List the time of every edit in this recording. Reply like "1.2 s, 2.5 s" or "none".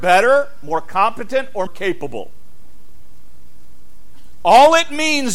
1.7 s